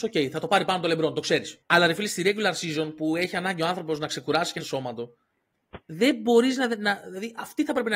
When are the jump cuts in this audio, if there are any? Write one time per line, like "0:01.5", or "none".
0:01.6
0:04.6
0:05.8